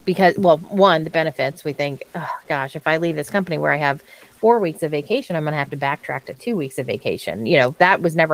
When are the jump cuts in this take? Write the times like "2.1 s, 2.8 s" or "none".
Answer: none